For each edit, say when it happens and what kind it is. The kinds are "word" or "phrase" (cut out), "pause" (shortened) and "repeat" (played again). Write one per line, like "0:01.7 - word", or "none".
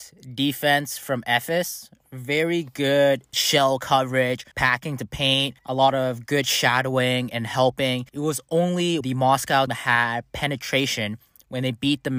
0:03.3 - word
0:04.5 - pause
0:05.6 - pause
0:08.1 - pause
0:09.0 - word
0:09.7 - word